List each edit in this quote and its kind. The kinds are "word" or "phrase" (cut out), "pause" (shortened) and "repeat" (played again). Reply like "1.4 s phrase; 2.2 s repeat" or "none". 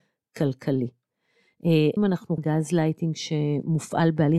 2.0 s word; 2.4 s word